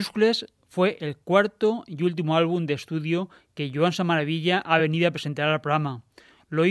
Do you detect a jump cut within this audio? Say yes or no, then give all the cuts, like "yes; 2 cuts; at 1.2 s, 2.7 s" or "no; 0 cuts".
no; 0 cuts